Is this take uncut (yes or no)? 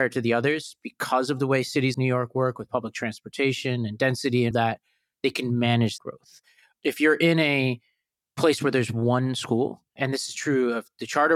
no